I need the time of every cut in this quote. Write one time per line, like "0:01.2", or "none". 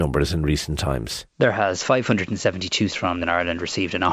0:01.3
0:02.9
0:03.2